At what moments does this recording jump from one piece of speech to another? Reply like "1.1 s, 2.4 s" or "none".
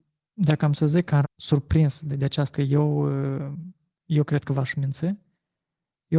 1.2 s, 2.1 s, 2.5 s

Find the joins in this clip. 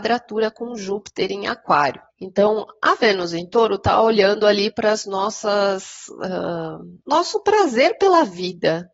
2.1 s, 7.0 s

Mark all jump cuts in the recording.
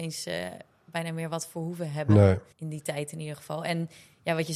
2.5 s

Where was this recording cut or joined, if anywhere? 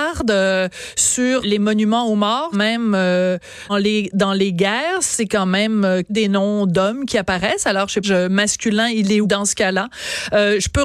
1.4 s, 2.5 s, 3.7 s, 6.1 s, 8.0 s, 9.2 s

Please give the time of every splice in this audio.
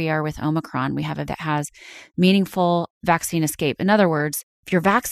1.3 s

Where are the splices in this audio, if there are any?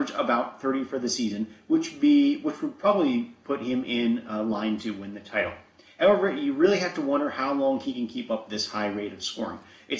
none

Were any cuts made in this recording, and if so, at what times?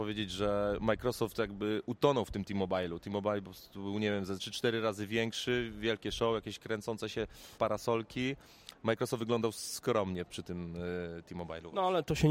4.4 s, 7.6 s, 10.3 s

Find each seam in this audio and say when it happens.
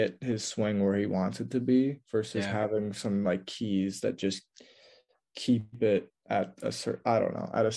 none

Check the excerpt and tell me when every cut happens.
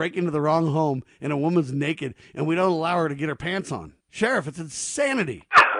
4.0 s

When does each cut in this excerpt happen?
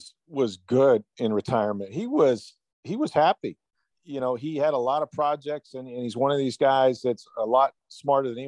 none

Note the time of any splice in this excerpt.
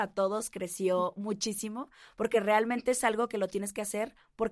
none

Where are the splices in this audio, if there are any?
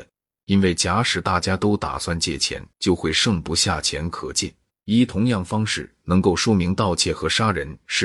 2.7 s, 4.7 s

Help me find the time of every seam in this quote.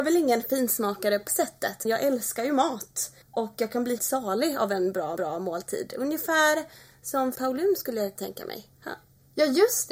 1.3 s, 1.8 s, 3.2 s, 4.0 s, 5.2 s, 7.3 s, 8.1 s, 8.7 s

